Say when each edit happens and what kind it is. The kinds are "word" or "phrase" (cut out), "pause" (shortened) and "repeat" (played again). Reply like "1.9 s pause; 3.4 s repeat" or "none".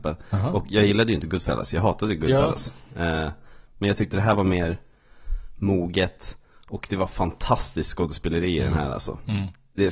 none